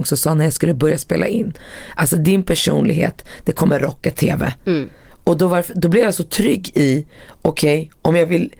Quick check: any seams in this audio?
no; 0 cuts

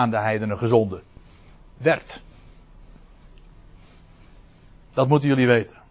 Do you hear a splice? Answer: no; 0 cuts

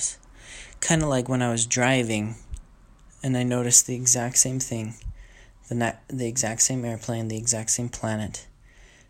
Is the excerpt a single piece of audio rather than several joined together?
yes; 0 cuts

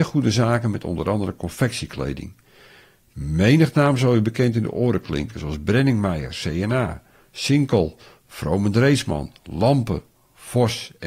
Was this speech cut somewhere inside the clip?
no; 0 cuts

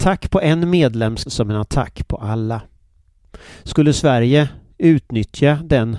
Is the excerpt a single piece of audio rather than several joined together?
no; 1 cut; at 1.3 s

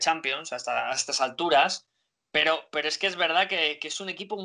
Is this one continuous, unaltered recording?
yes; 0 cuts

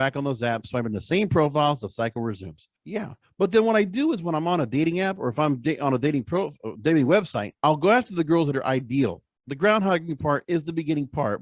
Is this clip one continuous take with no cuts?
no; 2 cuts; at 2.7 s, 7.6 s

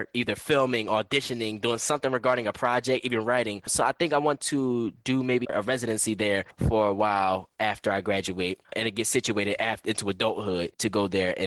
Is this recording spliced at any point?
yes; 2 cuts; at 5.4 s, 8.6 s

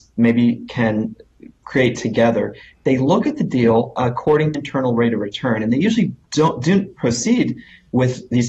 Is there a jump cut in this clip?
yes; 1 cut; at 4.5 s

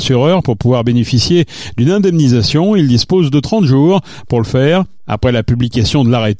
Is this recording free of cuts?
yes; 0 cuts

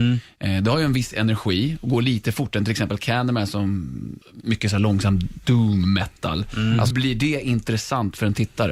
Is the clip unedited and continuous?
no; 2 cuts; at 4.2 s, 6.9 s

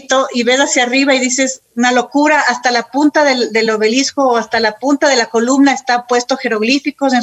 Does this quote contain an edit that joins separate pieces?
no; 0 cuts

